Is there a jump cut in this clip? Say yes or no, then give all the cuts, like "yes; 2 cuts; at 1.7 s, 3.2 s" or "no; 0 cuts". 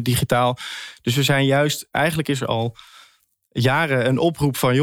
no; 0 cuts